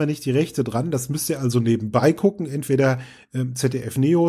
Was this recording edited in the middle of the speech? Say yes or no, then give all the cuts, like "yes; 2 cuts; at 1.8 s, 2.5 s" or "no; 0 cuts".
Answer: no; 0 cuts